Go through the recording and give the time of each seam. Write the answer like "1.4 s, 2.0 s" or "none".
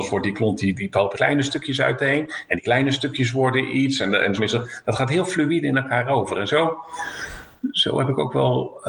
1.1 s, 4.4 s